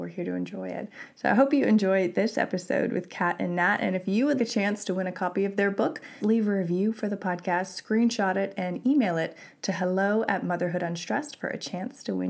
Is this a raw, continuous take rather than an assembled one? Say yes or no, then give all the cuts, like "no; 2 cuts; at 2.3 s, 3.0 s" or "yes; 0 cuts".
no; 2 cuts; at 4.4 s, 6.2 s